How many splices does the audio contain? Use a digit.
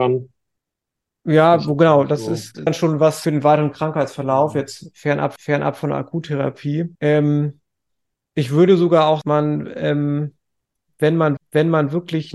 6